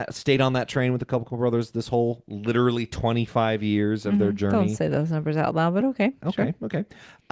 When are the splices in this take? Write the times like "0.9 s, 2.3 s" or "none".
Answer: none